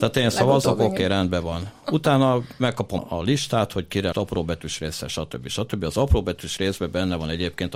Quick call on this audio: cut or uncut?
cut